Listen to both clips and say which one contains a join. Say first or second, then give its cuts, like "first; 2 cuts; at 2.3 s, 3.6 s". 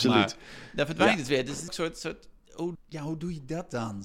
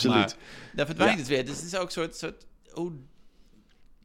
first; 2 cuts; at 1.7 s, 2.7 s